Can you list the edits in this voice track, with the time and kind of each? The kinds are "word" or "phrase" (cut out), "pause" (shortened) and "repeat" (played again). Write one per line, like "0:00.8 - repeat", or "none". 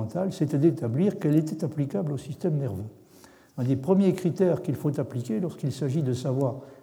none